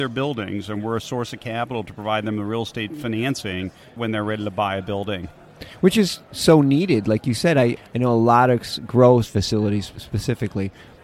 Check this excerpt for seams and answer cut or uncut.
uncut